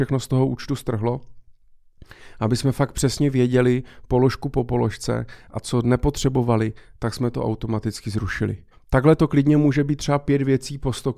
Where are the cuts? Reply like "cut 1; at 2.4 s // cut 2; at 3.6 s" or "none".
cut 1; at 8.7 s

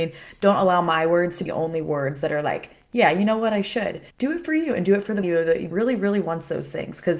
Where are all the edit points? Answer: cut 1; at 1.5 s // cut 2; at 4.1 s // cut 3; at 5.2 s // cut 4; at 5.7 s

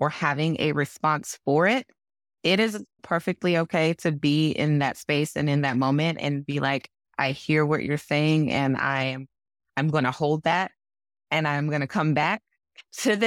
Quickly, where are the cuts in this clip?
none

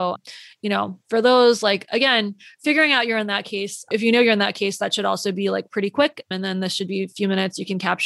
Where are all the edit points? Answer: none

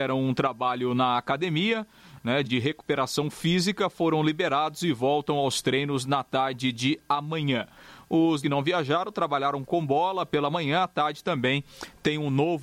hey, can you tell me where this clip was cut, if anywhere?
cut 1; at 2.4 s // cut 2; at 8.4 s

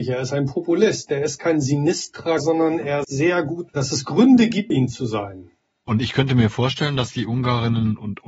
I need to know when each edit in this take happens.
cut 1; at 2.4 s // cut 2; at 3.0 s // cut 3; at 3.7 s // cut 4; at 4.7 s

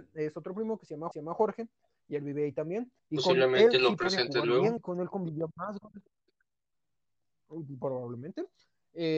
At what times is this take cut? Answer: cut 1; at 1.1 s // cut 2; at 3.0 s // cut 3; at 4.8 s

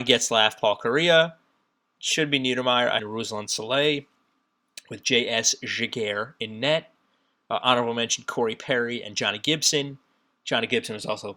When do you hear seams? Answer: cut 1; at 3.0 s

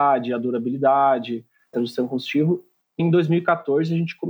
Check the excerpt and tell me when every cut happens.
cut 1; at 1.7 s // cut 2; at 3.0 s

